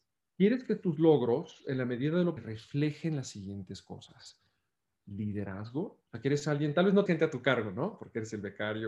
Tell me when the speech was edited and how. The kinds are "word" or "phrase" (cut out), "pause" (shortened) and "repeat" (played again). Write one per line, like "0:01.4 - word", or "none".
0:02.4 - word
0:07.1 - word